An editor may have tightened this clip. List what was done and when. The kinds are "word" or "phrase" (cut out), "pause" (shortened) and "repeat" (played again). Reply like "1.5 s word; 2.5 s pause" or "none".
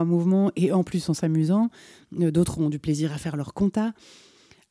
none